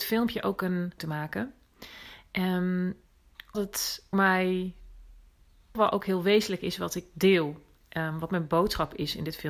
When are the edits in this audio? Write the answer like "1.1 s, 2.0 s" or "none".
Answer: 1.0 s, 3.5 s, 4.1 s, 5.7 s